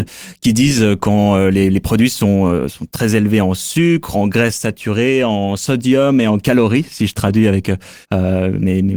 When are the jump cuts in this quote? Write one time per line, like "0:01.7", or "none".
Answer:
0:04.1
0:08.0